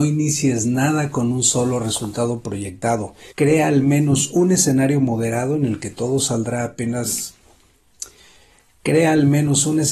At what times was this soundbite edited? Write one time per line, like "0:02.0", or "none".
0:03.3